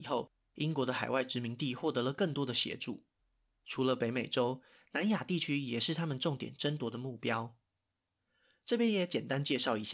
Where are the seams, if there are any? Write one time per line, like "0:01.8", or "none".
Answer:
none

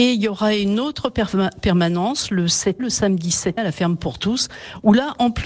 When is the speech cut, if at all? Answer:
0:02.8
0:03.6

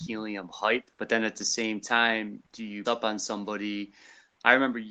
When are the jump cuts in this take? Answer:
0:00.9
0:02.5
0:02.9

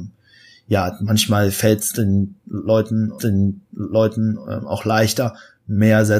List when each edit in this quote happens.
0:03.2

